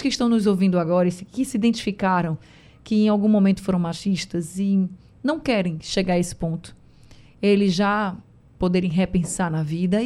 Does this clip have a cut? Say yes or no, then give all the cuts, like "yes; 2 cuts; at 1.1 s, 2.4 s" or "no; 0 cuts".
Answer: no; 0 cuts